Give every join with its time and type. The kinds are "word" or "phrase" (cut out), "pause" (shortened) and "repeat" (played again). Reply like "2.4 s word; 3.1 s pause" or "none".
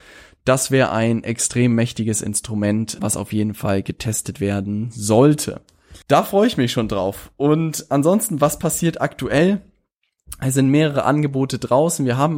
3.0 s word; 6.0 s pause

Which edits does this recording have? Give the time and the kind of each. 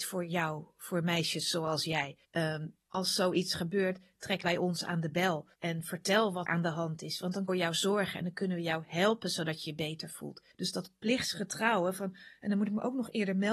2.2 s pause; 4.4 s word; 5.5 s pause; 6.5 s word; 7.5 s phrase; 10.5 s pause

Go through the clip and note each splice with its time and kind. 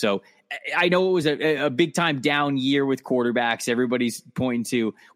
none

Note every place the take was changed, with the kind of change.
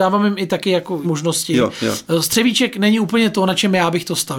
1.0 s word

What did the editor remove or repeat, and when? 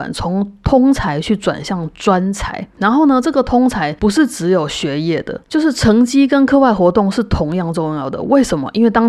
2.7 s pause

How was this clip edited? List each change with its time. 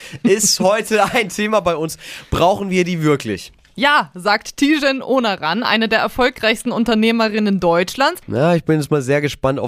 none

